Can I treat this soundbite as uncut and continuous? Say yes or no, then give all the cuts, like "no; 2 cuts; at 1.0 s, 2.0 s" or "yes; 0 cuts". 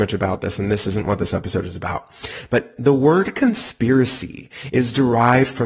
yes; 0 cuts